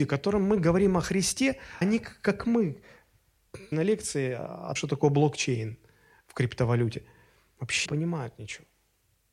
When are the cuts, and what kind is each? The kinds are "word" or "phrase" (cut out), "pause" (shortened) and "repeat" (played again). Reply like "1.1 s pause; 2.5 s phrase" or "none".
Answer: 1.8 s word; 3.7 s word; 4.8 s word; 7.9 s word

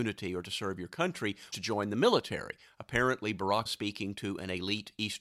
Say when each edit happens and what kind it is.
1.5 s word; 3.7 s word

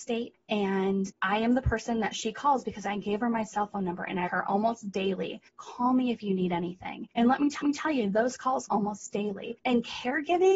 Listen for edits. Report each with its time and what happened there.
1.1 s word; 4.3 s word; 5.5 s pause; 7.6 s repeat; 8.7 s word

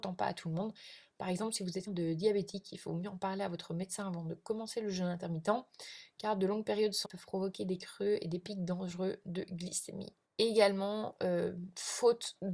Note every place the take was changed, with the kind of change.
1.9 s word; 7.0 s word; 10.2 s pause

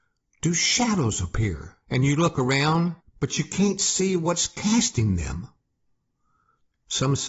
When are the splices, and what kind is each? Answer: 1.8 s pause; 3.0 s pause

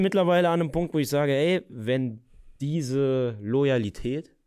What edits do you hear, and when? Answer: 2.6 s pause

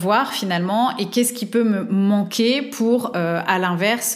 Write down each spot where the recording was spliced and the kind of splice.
none

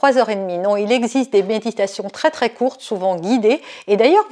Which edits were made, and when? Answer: none

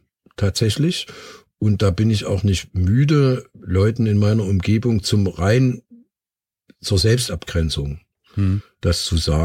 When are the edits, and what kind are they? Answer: none

